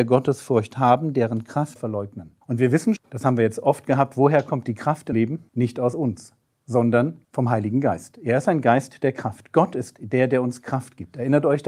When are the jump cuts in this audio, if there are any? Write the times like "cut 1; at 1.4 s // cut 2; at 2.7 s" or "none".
cut 1; at 1.8 s // cut 2; at 2.4 s // cut 3; at 3.0 s // cut 4; at 5.1 s // cut 5; at 5.5 s // cut 6; at 7.2 s